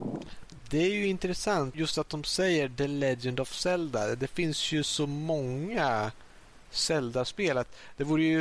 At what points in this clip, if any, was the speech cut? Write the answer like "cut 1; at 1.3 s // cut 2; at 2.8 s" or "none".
cut 1; at 1.7 s